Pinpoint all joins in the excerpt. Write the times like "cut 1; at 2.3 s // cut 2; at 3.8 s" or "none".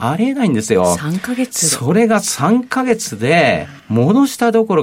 cut 1; at 3.8 s